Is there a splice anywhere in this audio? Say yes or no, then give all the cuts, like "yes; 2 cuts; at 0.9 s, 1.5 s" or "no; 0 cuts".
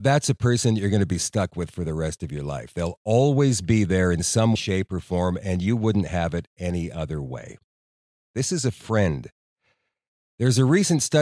yes; 1 cut; at 4.6 s